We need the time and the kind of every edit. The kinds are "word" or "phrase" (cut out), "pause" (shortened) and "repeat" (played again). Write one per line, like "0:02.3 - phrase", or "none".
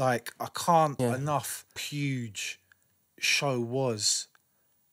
0:01.0 - word
0:01.8 - word
0:03.1 - word